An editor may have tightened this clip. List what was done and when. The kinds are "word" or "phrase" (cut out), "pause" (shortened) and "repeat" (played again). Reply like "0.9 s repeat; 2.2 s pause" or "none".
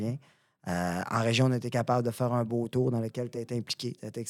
none